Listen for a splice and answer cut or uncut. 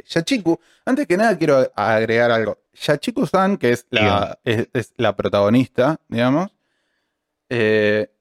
cut